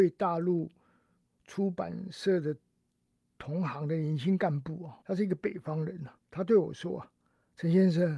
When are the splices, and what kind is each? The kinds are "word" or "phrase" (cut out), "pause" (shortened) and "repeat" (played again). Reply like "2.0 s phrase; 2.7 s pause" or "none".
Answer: 5.0 s pause; 6.2 s pause